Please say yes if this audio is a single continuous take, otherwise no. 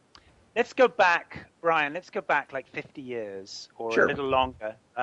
yes